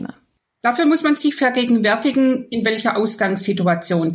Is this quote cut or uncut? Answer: uncut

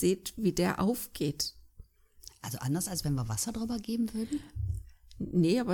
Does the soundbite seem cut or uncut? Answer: uncut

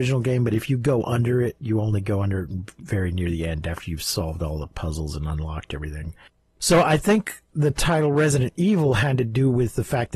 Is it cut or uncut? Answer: uncut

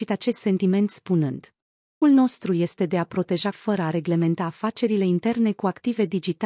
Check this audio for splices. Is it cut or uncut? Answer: cut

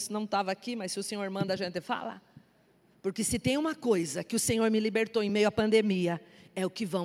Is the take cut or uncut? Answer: uncut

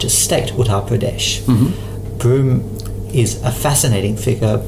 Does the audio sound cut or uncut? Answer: uncut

